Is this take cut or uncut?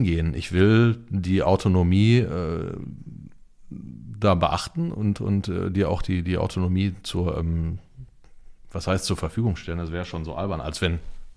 uncut